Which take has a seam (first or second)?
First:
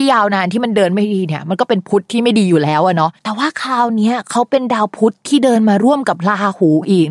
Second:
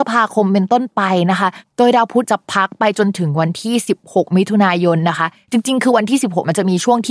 first